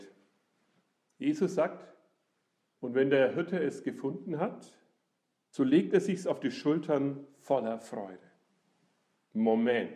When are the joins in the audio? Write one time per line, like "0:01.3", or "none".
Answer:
none